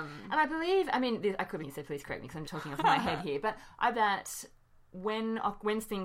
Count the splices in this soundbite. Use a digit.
4